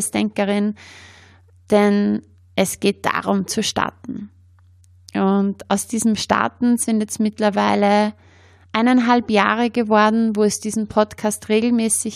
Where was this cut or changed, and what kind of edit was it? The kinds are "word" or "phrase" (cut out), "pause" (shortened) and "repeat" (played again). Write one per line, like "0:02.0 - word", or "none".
none